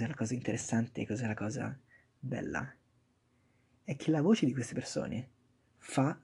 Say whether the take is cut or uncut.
uncut